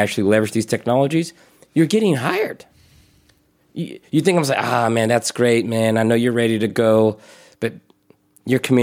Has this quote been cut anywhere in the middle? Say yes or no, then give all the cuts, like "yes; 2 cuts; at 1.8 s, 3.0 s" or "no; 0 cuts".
no; 0 cuts